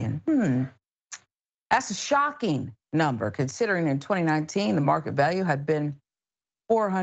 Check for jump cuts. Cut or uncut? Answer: uncut